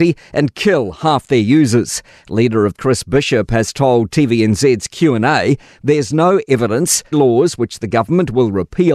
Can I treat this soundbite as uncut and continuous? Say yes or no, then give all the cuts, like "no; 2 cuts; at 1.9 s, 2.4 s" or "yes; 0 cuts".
no; 2 cuts; at 2.7 s, 7.1 s